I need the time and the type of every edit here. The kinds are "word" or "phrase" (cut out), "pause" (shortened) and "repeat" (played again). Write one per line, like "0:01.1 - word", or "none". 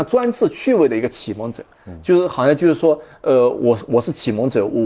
none